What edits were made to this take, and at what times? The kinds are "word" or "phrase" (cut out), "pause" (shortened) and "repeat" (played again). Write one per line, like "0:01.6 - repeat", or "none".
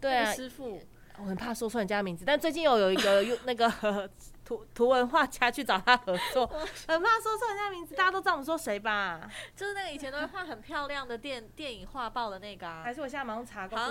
0:12.8 - phrase